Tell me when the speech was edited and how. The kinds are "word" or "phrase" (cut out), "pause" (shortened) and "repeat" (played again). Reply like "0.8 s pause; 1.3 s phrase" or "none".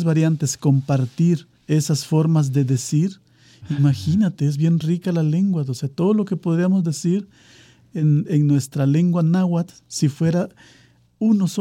1.6 s pause